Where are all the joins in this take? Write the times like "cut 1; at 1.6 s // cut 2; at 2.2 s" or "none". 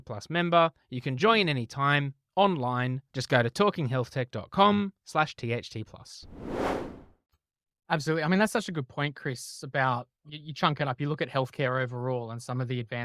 none